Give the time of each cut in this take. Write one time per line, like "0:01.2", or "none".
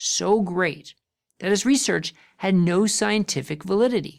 none